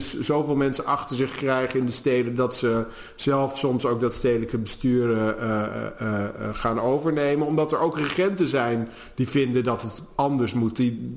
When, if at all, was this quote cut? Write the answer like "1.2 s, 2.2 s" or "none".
none